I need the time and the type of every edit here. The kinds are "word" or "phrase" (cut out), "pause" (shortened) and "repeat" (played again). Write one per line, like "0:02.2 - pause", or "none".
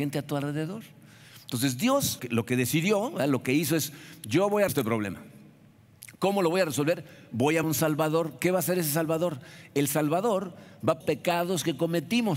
0:02.2 - word
0:04.7 - word
0:07.6 - word
0:11.0 - phrase